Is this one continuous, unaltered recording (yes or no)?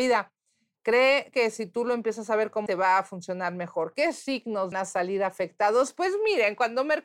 no